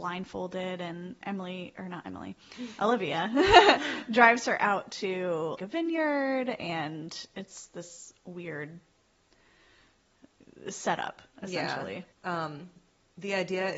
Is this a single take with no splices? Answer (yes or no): no